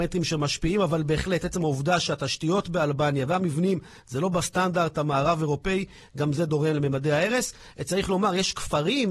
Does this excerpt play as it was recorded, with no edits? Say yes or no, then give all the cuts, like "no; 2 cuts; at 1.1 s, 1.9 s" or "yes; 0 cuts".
yes; 0 cuts